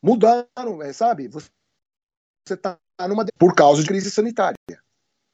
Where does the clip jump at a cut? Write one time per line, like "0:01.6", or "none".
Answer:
0:03.3
0:03.8